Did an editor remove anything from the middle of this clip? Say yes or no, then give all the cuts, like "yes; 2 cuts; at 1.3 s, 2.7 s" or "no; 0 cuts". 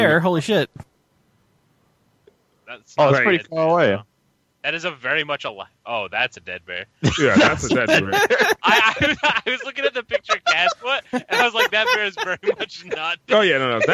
no; 0 cuts